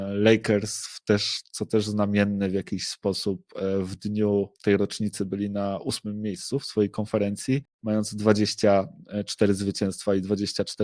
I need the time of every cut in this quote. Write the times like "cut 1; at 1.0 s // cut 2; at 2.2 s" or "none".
cut 1; at 4.5 s // cut 2; at 7.7 s